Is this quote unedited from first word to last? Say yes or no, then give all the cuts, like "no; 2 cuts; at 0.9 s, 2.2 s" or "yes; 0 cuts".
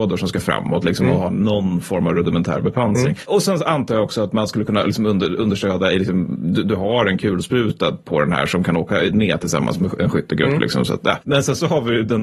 yes; 0 cuts